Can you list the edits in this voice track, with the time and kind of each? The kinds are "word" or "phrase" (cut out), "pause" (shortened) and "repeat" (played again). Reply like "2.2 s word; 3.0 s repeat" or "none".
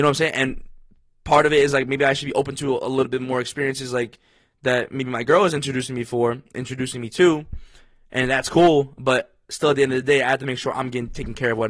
none